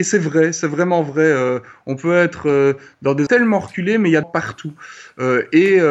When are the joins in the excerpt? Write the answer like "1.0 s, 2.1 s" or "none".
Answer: 3.3 s, 4.2 s